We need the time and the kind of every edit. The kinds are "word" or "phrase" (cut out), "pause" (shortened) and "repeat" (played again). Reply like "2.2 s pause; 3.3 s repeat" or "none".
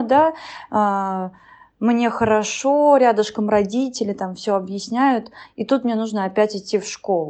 none